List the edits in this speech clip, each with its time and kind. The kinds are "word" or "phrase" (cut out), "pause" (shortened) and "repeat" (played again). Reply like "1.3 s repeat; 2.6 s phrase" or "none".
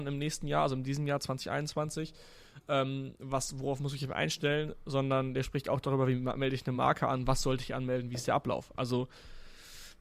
none